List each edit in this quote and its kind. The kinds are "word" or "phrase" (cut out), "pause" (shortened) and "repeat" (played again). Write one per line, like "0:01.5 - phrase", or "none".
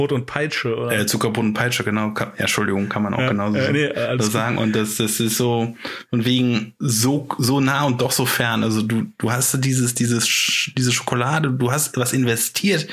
none